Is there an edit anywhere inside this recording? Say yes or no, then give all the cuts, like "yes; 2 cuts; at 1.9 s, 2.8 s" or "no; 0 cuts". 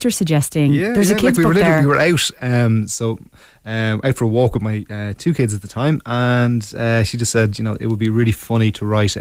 no; 0 cuts